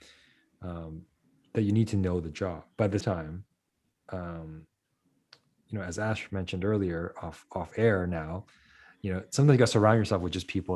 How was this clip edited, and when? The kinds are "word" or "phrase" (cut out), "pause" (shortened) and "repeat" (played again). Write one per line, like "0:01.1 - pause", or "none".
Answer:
0:03.0 - word